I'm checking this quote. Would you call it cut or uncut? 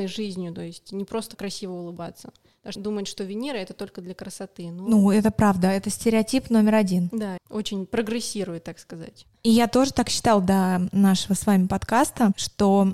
cut